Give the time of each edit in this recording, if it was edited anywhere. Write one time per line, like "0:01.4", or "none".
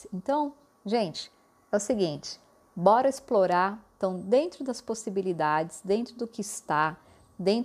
none

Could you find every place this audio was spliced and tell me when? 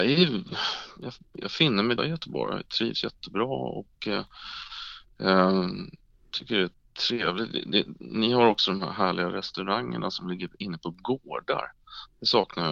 0:02.0

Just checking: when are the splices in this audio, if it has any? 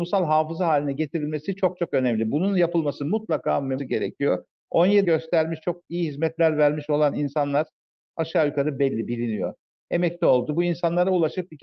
0:03.8
0:05.0

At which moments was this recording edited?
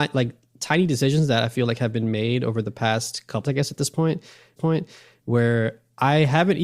0:03.4
0:04.6

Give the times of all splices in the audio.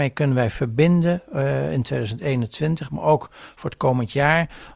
none

